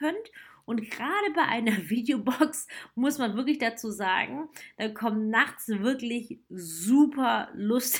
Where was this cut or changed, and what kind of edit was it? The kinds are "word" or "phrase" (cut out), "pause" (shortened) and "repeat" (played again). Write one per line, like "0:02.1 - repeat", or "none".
none